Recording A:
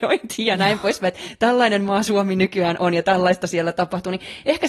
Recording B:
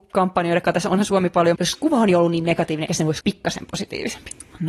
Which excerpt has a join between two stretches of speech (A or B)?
B